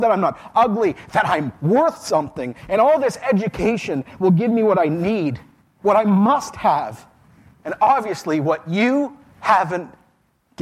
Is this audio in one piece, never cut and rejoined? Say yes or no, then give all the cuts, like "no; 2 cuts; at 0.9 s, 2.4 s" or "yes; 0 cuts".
yes; 0 cuts